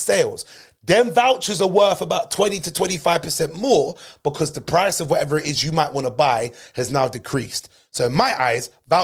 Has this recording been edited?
no; 0 cuts

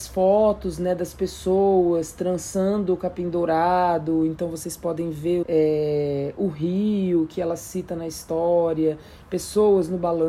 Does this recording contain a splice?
yes; 1 cut; at 5.4 s

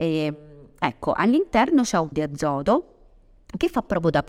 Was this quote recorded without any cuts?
no; 1 cut; at 2.1 s

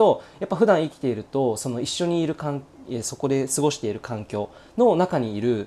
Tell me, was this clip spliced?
no; 0 cuts

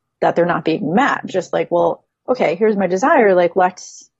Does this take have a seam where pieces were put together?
no; 0 cuts

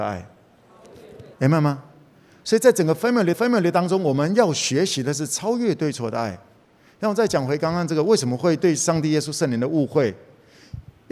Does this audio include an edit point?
yes; 2 cuts; at 1.3 s, 3.3 s

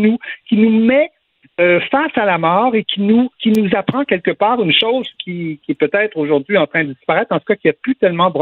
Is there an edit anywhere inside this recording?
no; 0 cuts

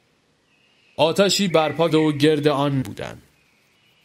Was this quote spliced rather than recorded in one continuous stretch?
yes; 3 cuts; at 1.5 s, 1.9 s, 2.8 s

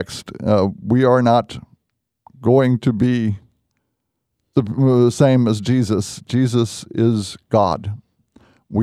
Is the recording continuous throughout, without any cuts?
yes; 0 cuts

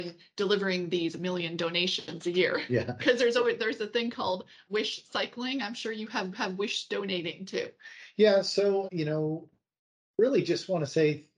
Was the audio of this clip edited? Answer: yes; 4 cuts; at 4.7 s, 6.3 s, 8.9 s, 9.8 s

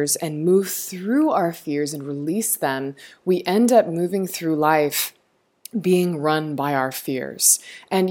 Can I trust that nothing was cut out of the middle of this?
yes; 0 cuts

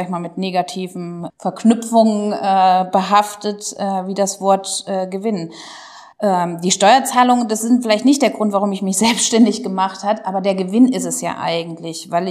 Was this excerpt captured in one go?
no; 1 cut; at 6.1 s

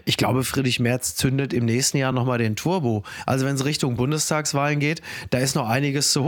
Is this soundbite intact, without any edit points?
yes; 0 cuts

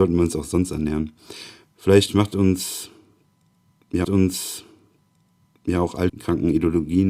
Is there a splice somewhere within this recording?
yes; 2 cuts; at 4.0 s, 6.1 s

